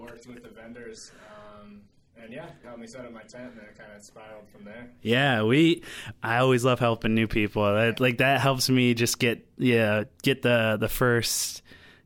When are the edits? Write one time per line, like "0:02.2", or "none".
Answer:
0:02.6